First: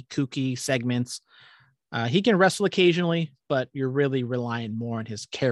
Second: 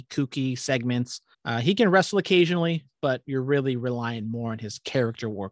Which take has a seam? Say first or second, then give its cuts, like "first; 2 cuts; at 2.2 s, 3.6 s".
second; 1 cut; at 1.3 s